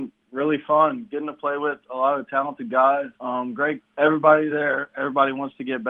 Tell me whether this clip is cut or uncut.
cut